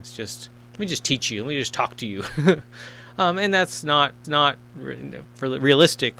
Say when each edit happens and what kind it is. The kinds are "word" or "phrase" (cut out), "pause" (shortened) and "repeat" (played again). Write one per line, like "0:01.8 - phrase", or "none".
0:04.2 - repeat